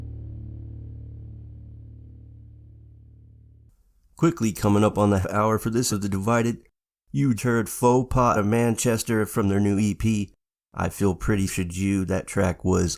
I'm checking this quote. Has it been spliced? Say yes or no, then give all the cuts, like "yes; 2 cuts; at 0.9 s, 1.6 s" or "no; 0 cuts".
yes; 5 cuts; at 5.2 s, 5.9 s, 7.4 s, 8.3 s, 11.5 s